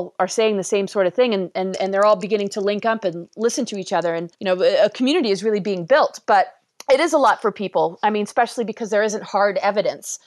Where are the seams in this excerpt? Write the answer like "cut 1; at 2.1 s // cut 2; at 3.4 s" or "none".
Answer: cut 1; at 4.3 s // cut 2; at 6.7 s